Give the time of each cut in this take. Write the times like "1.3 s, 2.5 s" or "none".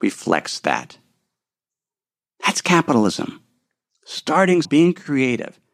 4.6 s